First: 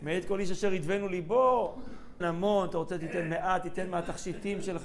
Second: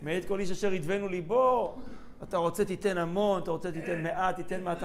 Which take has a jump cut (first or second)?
first